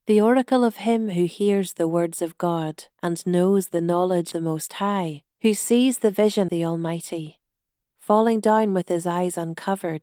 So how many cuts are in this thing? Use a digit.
4